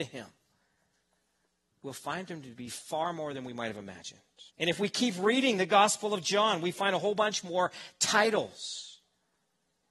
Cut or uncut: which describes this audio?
cut